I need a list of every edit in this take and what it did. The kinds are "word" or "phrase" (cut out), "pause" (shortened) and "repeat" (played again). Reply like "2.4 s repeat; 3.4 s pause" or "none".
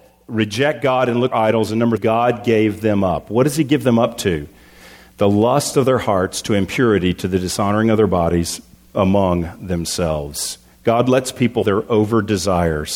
1.3 s word; 2.0 s word; 11.6 s word